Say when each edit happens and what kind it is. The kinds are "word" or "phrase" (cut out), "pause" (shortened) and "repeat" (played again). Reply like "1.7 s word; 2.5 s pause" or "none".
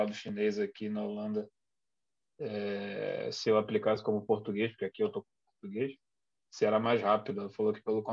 none